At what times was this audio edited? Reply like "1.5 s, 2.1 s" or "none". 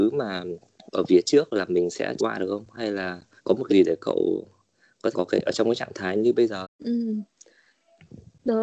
2.2 s, 3.4 s, 3.7 s, 5.1 s, 6.6 s